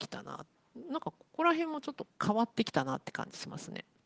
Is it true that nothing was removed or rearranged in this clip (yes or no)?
no